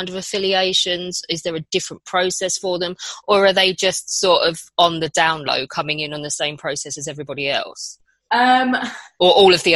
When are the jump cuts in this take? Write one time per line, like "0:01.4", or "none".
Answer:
none